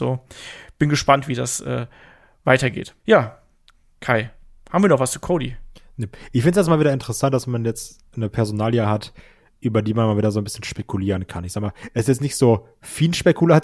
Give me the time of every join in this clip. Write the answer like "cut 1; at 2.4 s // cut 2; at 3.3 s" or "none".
cut 1; at 3.0 s